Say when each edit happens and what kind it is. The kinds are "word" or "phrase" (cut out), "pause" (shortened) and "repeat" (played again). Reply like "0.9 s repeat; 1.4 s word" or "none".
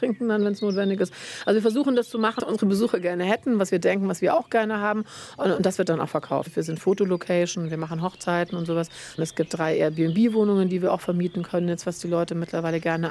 2.4 s word